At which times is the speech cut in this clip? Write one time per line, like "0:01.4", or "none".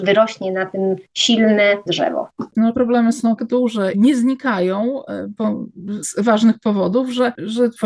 0:01.9
0:02.7
0:03.4
0:03.9
0:06.0